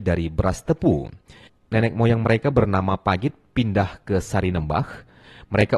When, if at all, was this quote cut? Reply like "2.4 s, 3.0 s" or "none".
none